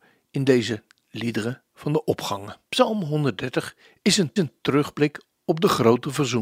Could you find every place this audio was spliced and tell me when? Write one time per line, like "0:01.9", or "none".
0:02.6
0:04.4